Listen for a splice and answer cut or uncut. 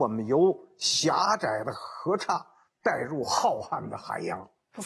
uncut